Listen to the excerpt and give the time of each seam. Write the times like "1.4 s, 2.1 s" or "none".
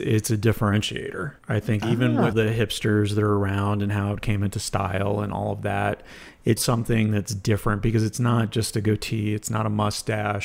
1.4 s, 2.3 s, 6.6 s